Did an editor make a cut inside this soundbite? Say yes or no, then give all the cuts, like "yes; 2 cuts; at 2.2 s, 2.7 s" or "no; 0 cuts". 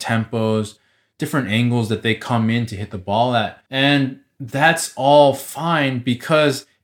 yes; 1 cut; at 3.7 s